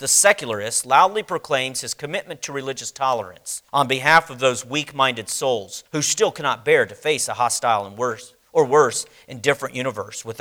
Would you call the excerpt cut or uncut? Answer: cut